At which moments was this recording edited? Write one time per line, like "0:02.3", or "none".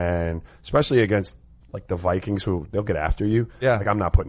none